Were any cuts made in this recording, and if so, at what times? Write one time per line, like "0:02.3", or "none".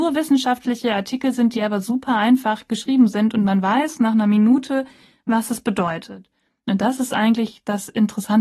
none